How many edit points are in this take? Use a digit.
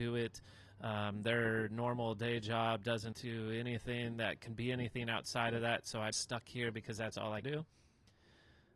3